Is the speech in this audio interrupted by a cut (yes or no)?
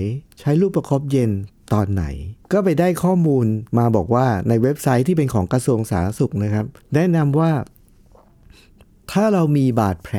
yes